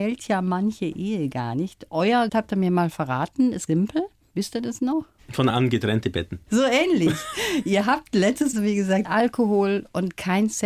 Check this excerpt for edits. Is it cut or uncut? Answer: cut